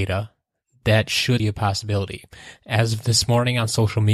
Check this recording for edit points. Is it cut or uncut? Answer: cut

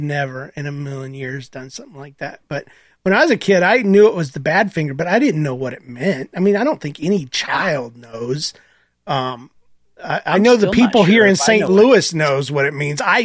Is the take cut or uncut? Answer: uncut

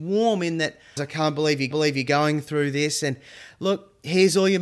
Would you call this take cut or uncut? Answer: cut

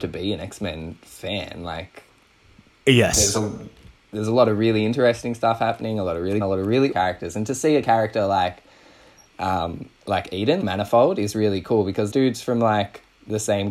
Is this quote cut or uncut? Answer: cut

